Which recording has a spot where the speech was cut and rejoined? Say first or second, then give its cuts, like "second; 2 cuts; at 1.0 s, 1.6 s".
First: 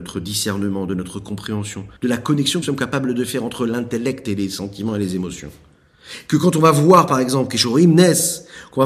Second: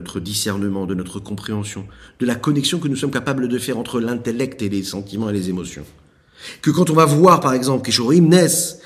first; 2 cuts; at 2.0 s, 2.6 s